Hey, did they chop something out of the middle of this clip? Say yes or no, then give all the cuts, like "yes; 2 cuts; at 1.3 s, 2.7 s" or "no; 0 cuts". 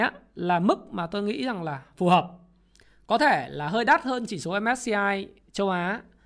no; 0 cuts